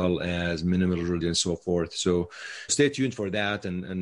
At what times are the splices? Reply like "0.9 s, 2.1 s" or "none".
1.2 s, 2.7 s

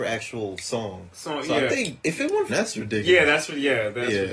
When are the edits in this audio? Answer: 1.7 s, 2.5 s

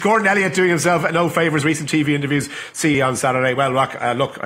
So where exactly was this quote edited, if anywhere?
1.6 s, 2.9 s

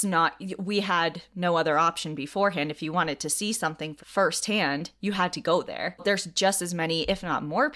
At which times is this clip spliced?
4.0 s, 6.0 s

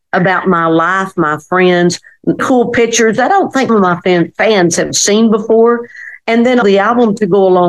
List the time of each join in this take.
2.4 s, 3.7 s, 6.6 s

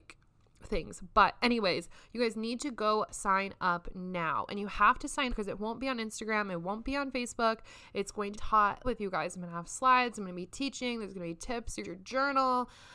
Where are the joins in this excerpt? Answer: 5.3 s, 8.3 s, 8.8 s, 11.8 s

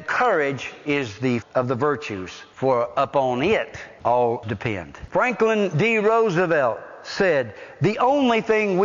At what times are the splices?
1.4 s, 4.4 s

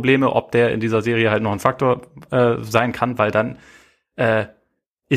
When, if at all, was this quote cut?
none

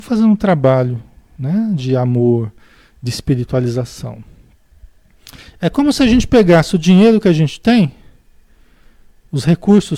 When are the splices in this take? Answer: none

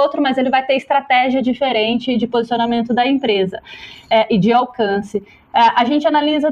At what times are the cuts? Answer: none

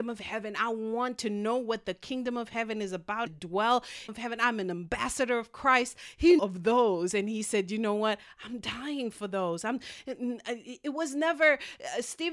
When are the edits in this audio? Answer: 3.3 s, 4.1 s, 6.4 s

